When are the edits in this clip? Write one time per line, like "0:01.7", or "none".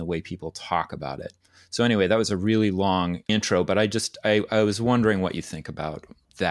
none

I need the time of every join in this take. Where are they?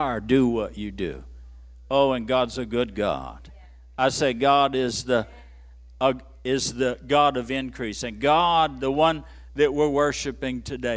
none

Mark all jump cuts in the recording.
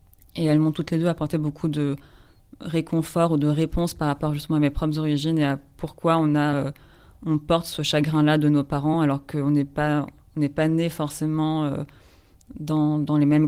none

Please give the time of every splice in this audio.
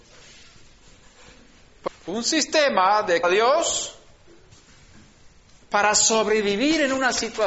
0:01.9
0:03.2

